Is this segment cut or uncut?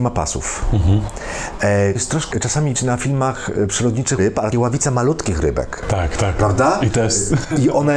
cut